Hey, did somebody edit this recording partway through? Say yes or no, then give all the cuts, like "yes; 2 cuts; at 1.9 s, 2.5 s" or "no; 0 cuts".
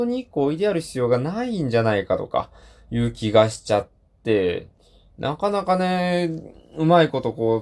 no; 0 cuts